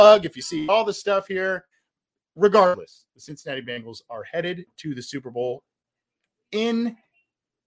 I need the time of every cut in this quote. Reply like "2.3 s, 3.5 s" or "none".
none